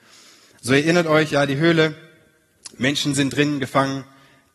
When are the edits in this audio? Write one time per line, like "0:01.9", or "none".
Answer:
none